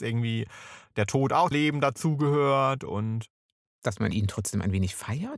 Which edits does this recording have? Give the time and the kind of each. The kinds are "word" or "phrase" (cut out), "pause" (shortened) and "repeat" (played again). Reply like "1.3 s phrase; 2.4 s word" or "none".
1.5 s word